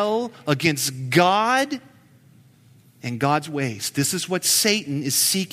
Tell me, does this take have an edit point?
no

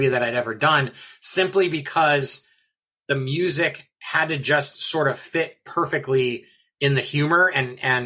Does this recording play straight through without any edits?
yes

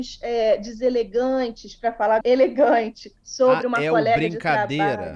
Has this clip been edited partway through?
yes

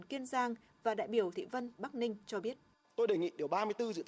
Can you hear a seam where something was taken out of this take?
yes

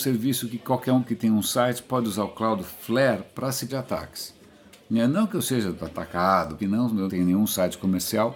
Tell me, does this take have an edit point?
yes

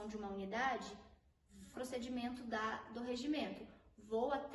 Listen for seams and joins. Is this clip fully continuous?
no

